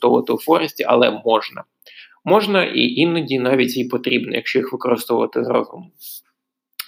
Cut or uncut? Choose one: uncut